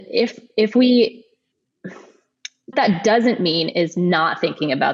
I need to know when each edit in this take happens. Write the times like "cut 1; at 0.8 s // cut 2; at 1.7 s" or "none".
cut 1; at 2.7 s